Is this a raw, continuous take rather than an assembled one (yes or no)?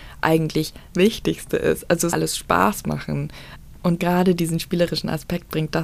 no